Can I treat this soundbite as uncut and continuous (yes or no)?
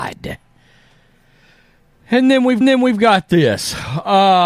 no